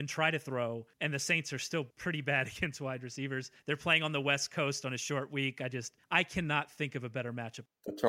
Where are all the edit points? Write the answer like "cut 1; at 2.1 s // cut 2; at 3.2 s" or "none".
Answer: cut 1; at 0.9 s // cut 2; at 1.9 s // cut 3; at 3.6 s // cut 4; at 6.0 s